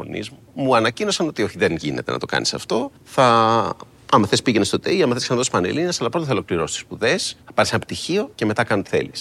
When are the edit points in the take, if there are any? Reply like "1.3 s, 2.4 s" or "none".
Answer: 3.0 s, 7.4 s